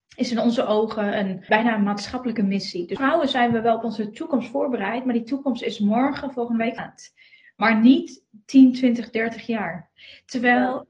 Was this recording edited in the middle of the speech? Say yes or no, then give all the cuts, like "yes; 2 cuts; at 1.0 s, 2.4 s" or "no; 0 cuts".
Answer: yes; 2 cuts; at 1.5 s, 6.8 s